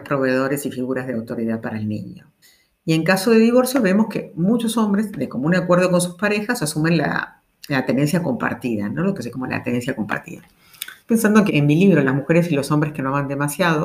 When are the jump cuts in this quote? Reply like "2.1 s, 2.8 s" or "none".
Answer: 2.4 s, 9.3 s, 11.0 s, 11.5 s